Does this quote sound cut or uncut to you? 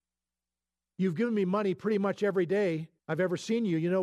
cut